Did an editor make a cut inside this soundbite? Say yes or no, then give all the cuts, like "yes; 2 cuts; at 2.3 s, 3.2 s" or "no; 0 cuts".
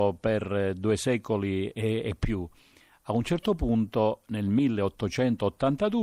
no; 0 cuts